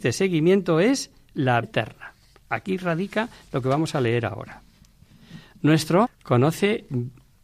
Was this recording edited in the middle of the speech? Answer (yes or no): yes